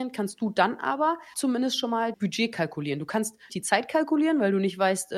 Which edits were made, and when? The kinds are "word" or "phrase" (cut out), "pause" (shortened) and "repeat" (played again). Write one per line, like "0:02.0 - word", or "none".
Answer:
0:01.3 - word
0:02.1 - word
0:03.5 - word